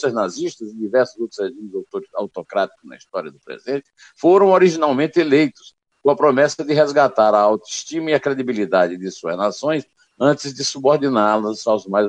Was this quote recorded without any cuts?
yes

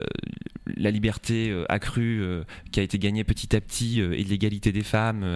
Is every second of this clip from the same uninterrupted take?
yes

